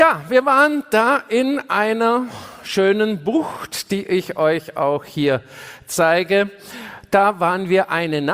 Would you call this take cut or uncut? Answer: uncut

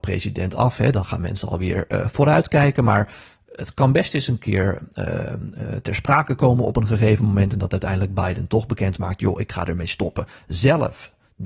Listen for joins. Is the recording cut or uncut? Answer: uncut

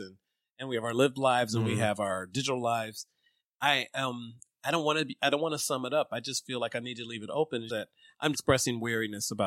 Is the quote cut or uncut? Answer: cut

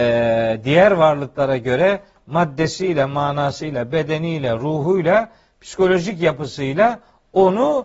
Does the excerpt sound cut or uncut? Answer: uncut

